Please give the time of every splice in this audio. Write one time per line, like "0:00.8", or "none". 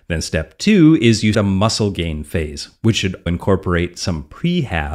0:01.3
0:03.3